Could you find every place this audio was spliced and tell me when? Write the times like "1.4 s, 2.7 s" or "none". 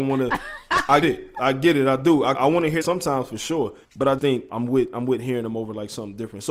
1.0 s, 2.3 s, 2.8 s, 3.8 s, 4.2 s, 4.5 s